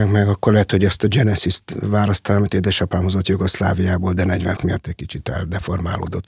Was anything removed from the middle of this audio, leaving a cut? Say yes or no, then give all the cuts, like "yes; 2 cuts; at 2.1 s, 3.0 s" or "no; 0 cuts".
yes; 1 cut; at 4.6 s